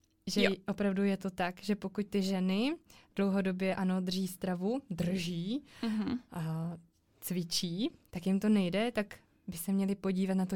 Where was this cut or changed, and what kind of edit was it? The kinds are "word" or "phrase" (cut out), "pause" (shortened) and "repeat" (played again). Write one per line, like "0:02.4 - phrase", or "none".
none